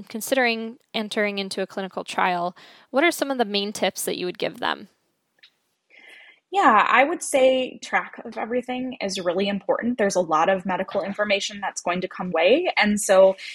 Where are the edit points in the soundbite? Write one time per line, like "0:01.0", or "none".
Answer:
0:07.8
0:12.3